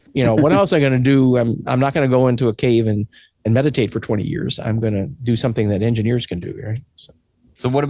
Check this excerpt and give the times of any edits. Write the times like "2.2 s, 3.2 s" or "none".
none